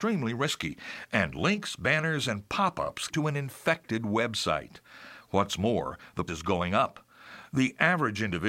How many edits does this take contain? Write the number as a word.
two